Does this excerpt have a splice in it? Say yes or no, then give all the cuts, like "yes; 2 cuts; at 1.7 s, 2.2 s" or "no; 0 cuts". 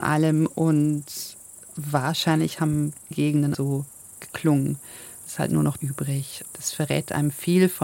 yes; 5 cuts; at 3.1 s, 3.5 s, 5.3 s, 5.8 s, 6.5 s